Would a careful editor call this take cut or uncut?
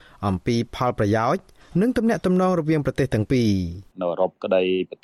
cut